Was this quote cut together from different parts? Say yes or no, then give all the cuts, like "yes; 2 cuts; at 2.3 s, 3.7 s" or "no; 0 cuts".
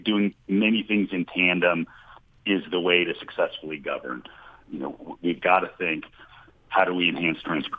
no; 0 cuts